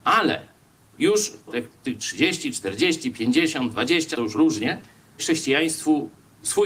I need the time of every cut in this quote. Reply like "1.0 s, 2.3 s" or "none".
1.5 s, 4.1 s, 5.2 s